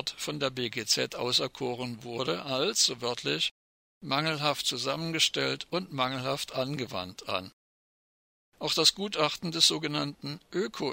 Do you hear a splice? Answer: no; 0 cuts

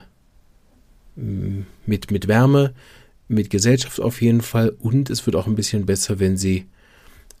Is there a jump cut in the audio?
no; 0 cuts

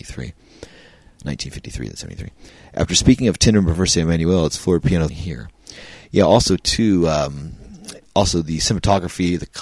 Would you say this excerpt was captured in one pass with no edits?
no; 1 cut; at 5.1 s

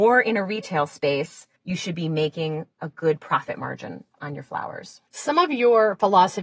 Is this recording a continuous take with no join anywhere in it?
no; 2 cuts; at 1.6 s, 5.1 s

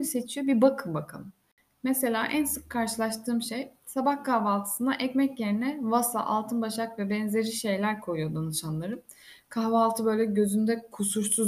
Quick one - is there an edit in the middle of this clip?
no; 0 cuts

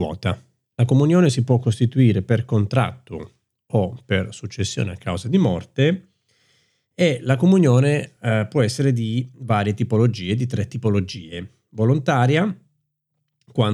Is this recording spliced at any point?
no; 0 cuts

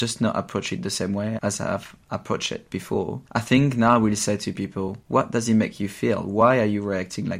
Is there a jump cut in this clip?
yes; 2 cuts; at 3.3 s, 5.0 s

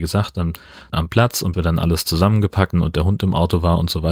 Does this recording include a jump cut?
yes; 3 cuts; at 0.9 s, 1.5 s, 2.7 s

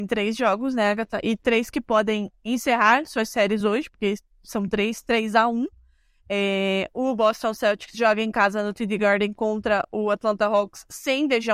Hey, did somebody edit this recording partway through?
no; 0 cuts

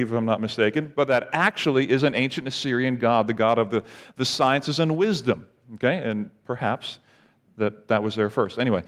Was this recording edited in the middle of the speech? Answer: no; 0 cuts

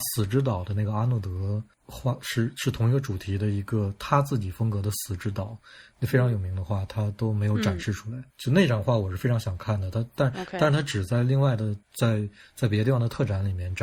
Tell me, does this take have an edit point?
yes; 2 cuts; at 8.3 s, 11.8 s

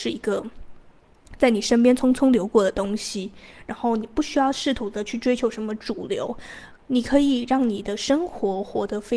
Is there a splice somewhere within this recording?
yes; 1 cut; at 6.8 s

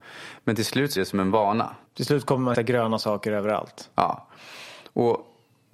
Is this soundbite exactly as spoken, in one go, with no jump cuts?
no; 3 cuts; at 1.0 s, 1.9 s, 2.5 s

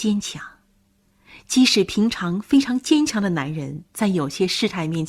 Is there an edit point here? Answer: yes; 1 cut; at 3.9 s

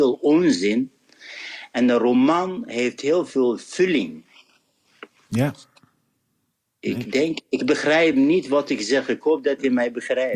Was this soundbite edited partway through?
no; 0 cuts

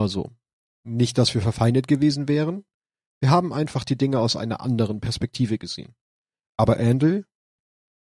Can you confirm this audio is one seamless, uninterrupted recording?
yes; 0 cuts

